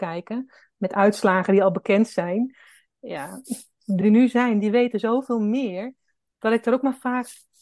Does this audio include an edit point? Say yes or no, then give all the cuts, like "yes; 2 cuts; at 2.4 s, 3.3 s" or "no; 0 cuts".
yes; 1 cut; at 4.0 s